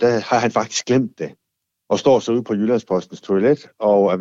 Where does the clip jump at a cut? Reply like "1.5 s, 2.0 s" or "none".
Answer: none